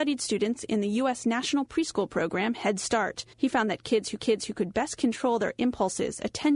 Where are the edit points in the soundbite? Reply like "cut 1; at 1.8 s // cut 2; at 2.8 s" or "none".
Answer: cut 1; at 3.3 s // cut 2; at 4.2 s